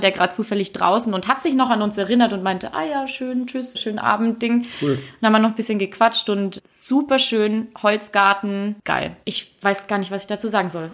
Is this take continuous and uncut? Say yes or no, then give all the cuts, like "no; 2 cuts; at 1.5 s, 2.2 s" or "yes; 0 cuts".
no; 2 cuts; at 3.7 s, 9.2 s